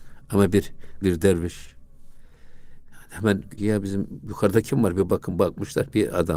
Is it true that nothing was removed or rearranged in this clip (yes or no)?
no